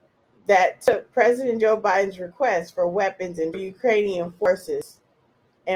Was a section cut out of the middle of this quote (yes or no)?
yes